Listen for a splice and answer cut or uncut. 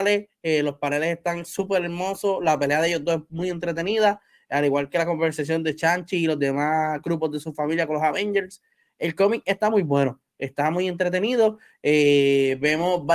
uncut